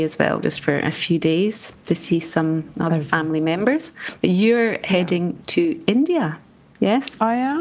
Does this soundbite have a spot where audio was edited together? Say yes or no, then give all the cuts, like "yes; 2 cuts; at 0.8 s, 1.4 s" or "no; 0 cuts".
no; 0 cuts